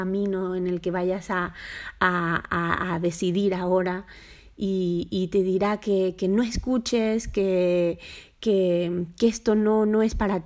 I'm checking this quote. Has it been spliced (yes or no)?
no